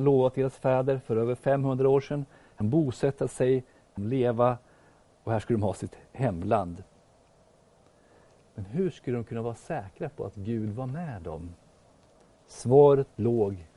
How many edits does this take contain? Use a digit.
2